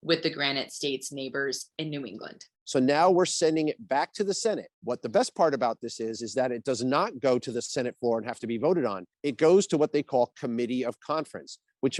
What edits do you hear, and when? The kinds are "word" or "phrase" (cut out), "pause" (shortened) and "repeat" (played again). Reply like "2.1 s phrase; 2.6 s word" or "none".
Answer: 4.7 s pause; 9.1 s pause